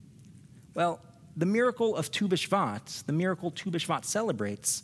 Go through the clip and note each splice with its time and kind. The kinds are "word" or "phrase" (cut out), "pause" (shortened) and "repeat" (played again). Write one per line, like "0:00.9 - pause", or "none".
none